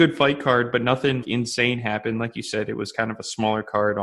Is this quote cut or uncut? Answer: cut